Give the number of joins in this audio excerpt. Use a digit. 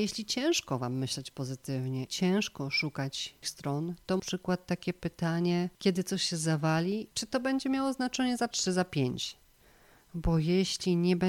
6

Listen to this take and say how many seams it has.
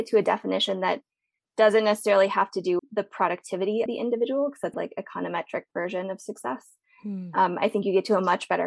3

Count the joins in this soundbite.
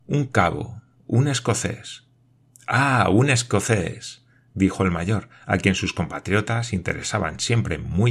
1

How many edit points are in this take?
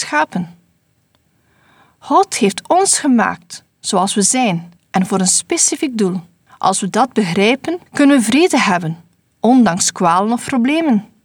3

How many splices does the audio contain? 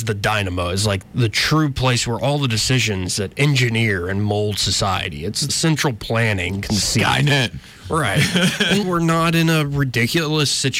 3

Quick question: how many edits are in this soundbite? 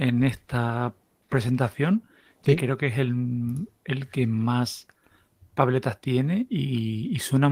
0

